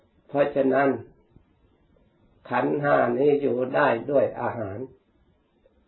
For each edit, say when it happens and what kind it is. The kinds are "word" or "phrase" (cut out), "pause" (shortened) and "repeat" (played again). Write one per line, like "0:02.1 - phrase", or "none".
none